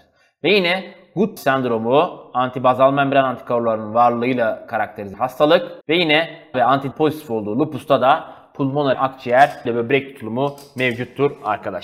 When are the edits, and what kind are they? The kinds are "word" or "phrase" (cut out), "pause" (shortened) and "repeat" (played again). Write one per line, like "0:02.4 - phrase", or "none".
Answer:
0:01.4 - word
0:05.1 - word
0:05.8 - pause
0:06.5 - word
0:06.9 - word
0:08.9 - phrase
0:09.6 - word

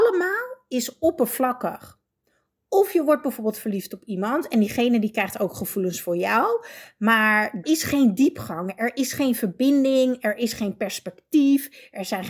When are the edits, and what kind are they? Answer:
0:07.6 - word

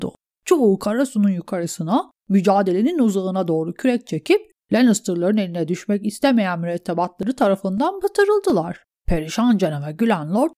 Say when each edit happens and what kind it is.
none

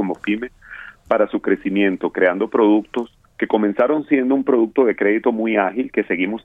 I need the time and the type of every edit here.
0:03.3 - pause

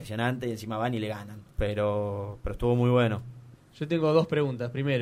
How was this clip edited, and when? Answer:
0:01.5 - pause
0:03.5 - pause

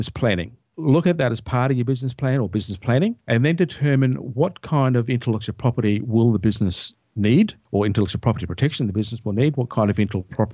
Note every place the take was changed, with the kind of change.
0:07.6 - pause

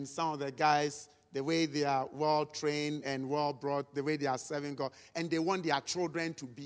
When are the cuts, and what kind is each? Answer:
none

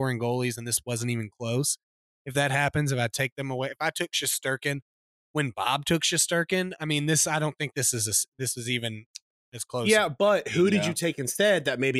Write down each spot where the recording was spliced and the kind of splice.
none

